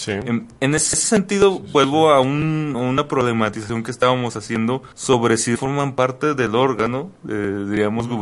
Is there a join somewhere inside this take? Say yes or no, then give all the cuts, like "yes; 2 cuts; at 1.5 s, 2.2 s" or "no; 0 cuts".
yes; 3 cuts; at 0.9 s, 4.9 s, 5.6 s